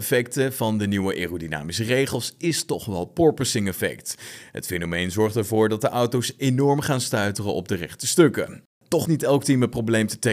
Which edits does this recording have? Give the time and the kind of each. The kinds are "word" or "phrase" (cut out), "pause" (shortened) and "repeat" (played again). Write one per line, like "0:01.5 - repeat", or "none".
0:09.1 - word